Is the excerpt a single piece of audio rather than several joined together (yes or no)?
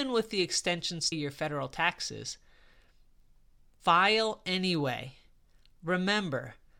no